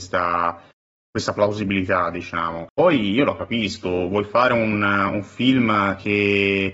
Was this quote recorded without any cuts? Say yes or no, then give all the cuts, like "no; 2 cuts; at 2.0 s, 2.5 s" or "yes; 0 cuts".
no; 1 cut; at 2.7 s